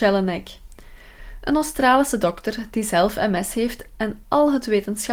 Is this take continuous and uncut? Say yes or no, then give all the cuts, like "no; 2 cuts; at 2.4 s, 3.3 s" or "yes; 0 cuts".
yes; 0 cuts